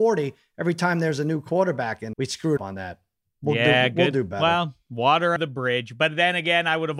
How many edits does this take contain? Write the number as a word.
three